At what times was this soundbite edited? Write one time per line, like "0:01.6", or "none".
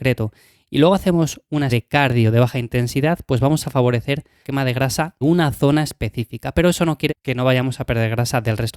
0:01.7
0:04.4
0:05.2
0:07.1